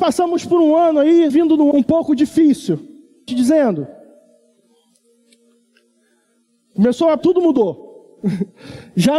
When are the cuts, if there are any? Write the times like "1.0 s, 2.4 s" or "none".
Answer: 1.3 s, 1.7 s, 3.3 s, 7.2 s